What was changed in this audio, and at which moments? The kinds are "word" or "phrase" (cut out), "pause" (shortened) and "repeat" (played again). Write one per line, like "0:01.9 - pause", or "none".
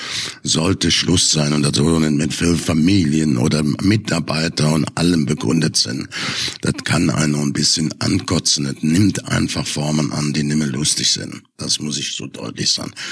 none